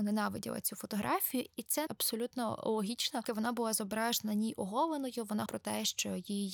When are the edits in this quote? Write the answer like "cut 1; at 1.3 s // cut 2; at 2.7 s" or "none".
cut 1; at 1.9 s // cut 2; at 3.2 s // cut 3; at 5.5 s